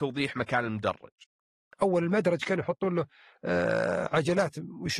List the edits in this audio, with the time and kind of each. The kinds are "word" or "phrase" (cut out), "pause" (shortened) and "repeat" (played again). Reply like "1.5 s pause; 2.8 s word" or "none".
none